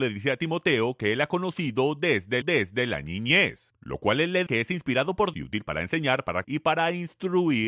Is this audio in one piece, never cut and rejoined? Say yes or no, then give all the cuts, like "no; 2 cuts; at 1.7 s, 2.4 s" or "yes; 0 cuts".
no; 4 cuts; at 2.4 s, 4.5 s, 5.3 s, 6.4 s